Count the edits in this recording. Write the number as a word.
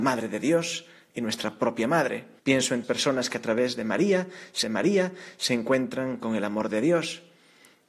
three